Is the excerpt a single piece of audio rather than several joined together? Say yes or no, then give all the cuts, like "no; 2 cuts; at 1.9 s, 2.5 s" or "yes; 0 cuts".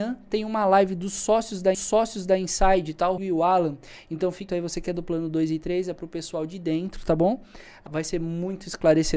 no; 4 cuts; at 1.7 s, 3.2 s, 4.5 s, 7.9 s